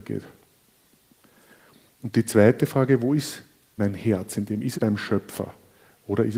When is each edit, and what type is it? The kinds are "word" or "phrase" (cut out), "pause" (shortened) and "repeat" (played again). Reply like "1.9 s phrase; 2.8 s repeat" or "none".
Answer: 3.8 s word; 4.7 s word